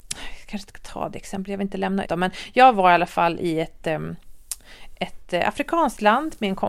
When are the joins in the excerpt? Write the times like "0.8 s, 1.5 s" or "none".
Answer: 2.0 s

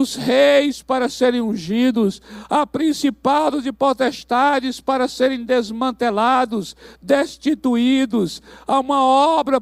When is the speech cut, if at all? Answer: none

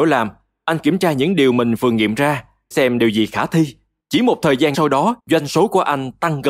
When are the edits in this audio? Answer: 2.7 s, 4.0 s, 4.7 s, 5.2 s

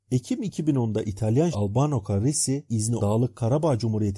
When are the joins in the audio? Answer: 1.5 s, 2.7 s, 3.0 s

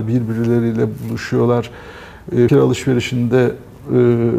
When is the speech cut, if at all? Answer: 2.5 s

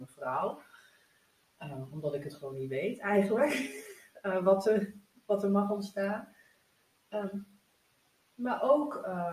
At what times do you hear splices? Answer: none

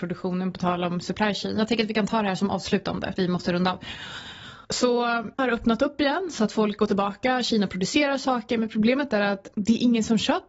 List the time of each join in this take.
3.2 s, 5.4 s

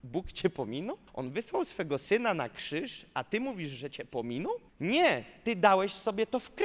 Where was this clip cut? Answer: 1.1 s, 4.7 s

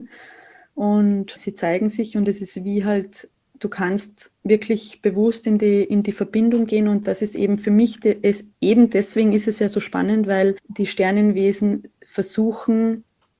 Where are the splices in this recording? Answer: none

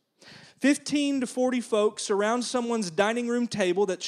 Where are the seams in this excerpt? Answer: none

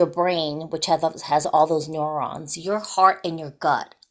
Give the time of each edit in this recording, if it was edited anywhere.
none

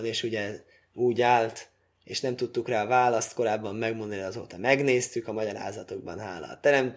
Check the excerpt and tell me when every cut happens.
none

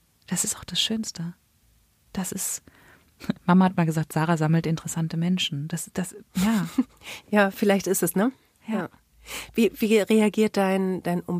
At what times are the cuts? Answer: 1.6 s, 8.1 s

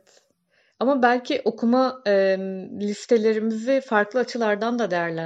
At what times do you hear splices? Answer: none

